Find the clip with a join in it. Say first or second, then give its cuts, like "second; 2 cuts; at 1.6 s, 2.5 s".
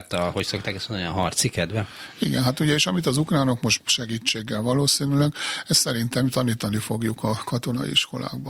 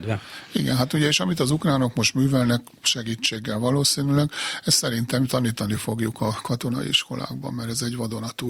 first; 1 cut; at 3.8 s